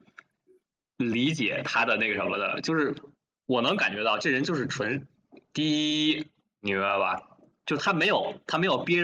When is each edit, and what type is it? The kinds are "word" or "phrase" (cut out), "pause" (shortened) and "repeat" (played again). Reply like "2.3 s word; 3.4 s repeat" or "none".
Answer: none